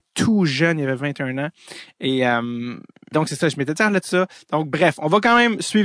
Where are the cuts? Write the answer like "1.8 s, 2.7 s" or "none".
3.1 s, 4.0 s